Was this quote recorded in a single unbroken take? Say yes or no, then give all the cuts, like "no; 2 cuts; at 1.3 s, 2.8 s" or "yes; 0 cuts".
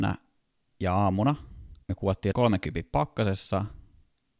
no; 2 cuts; at 1.8 s, 2.3 s